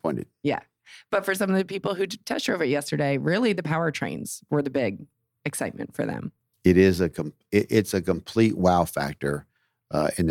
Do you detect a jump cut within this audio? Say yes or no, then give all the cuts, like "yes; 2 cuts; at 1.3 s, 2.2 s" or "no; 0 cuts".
yes; 1 cut; at 6.5 s